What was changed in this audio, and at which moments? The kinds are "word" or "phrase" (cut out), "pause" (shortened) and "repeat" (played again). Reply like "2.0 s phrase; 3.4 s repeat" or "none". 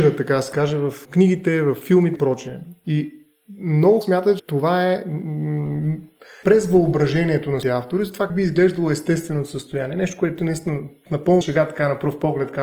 1.0 s word; 2.1 s word; 4.0 s word; 4.4 s word; 6.4 s word; 7.6 s word; 8.3 s word; 11.4 s word